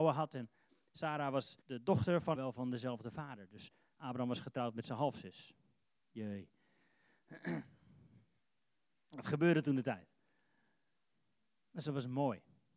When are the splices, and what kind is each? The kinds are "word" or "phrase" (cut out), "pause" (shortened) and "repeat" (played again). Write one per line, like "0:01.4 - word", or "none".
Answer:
0:01.6 - pause
0:02.4 - phrase